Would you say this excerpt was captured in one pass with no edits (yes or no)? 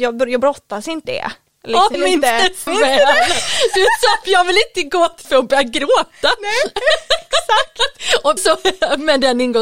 no